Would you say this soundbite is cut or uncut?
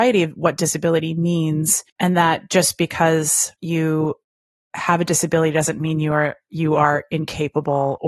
cut